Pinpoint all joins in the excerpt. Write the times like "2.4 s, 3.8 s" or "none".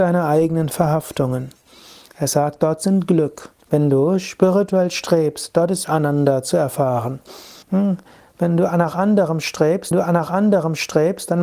3.6 s, 5.8 s, 7.6 s, 9.9 s